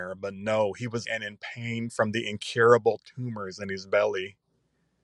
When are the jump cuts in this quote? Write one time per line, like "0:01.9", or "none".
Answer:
0:01.0